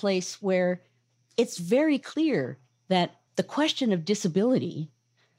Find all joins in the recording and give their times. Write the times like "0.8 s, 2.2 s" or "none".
3.3 s